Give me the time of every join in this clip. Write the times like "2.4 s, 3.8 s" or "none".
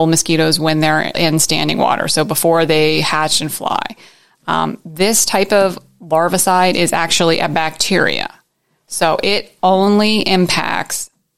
1.1 s